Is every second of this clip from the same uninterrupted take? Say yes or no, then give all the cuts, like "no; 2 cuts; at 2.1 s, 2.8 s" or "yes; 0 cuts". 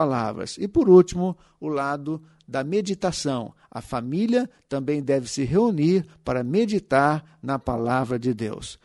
yes; 0 cuts